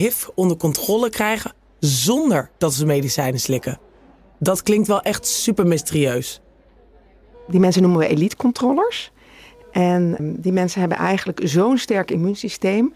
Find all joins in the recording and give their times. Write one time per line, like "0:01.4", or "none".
0:10.2